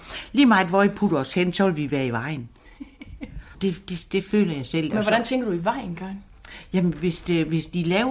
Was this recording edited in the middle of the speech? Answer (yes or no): yes